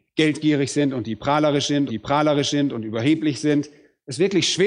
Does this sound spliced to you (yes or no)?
yes